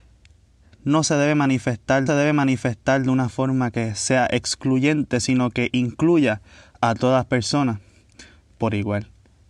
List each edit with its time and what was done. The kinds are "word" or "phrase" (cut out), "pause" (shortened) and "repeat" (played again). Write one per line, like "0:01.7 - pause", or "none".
0:02.1 - repeat